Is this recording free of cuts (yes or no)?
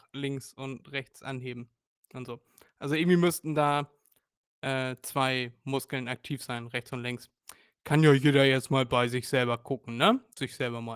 yes